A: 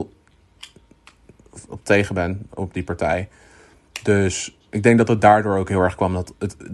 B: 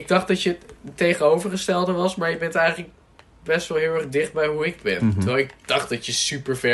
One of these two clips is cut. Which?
A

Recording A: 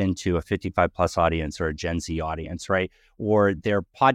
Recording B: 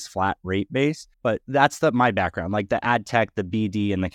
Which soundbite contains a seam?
B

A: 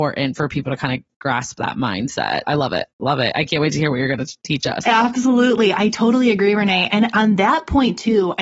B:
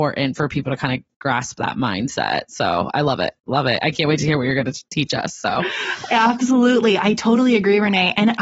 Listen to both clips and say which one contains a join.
A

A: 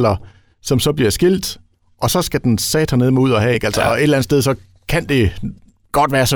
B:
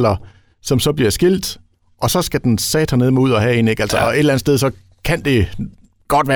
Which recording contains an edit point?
A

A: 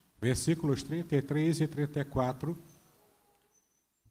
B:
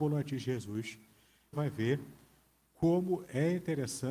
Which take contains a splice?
B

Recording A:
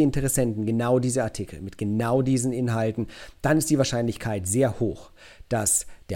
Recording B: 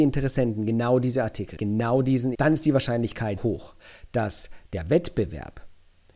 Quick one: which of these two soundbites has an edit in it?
B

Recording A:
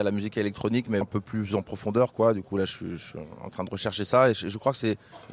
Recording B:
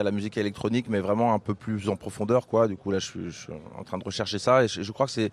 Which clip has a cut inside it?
A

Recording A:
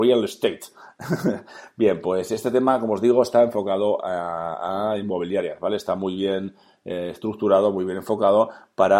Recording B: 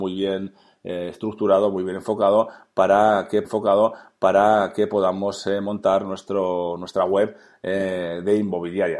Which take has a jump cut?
B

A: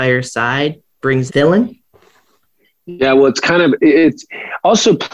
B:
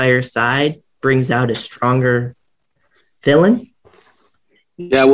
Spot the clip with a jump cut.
A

